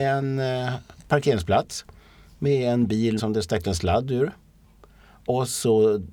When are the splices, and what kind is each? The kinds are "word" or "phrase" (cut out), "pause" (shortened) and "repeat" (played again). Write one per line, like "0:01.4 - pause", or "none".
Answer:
0:01.0 - word
0:03.2 - word
0:03.6 - word